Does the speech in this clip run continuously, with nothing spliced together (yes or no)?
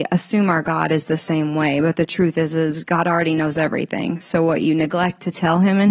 yes